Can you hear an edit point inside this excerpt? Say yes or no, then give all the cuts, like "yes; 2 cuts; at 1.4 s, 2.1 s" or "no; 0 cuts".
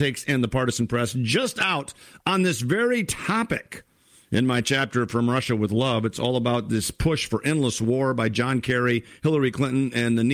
no; 0 cuts